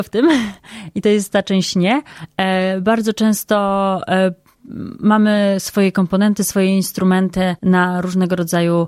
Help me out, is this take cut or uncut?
cut